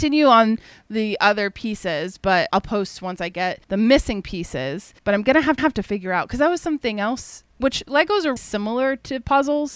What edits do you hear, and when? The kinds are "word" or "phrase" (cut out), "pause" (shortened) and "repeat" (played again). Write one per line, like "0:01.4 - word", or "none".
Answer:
0:02.5 - word
0:03.6 - pause
0:05.0 - pause
0:05.6 - repeat
0:07.5 - pause
0:08.4 - word